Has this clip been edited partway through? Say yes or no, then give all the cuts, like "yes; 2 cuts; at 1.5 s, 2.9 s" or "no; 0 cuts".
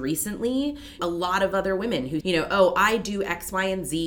yes; 2 cuts; at 1.0 s, 2.2 s